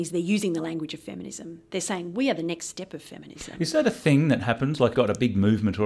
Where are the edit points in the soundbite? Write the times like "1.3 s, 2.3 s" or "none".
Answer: 4.9 s